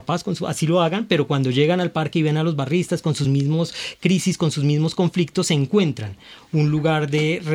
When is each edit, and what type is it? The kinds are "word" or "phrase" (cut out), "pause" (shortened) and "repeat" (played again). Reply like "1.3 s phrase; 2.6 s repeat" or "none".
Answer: none